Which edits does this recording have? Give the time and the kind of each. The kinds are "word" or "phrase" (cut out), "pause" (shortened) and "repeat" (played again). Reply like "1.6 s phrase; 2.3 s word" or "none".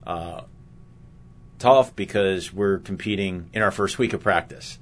none